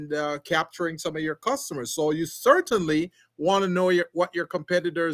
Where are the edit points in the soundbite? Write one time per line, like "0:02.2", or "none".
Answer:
none